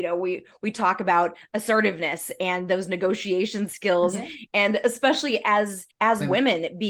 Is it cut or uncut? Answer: cut